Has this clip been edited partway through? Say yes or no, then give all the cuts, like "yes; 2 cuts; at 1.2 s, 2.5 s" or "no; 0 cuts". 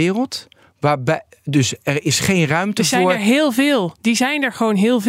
no; 0 cuts